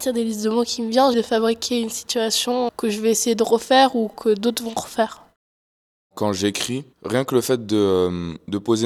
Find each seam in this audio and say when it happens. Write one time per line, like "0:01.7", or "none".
0:01.1
0:02.7